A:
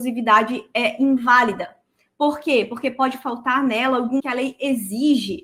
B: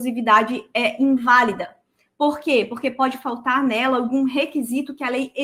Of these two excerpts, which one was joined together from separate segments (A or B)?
A